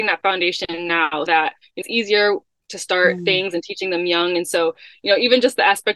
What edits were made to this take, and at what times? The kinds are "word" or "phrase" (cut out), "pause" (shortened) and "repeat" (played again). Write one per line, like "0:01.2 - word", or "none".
0:01.3 - word
0:01.8 - word